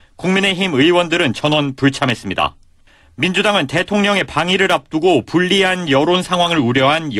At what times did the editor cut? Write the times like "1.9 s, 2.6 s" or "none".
none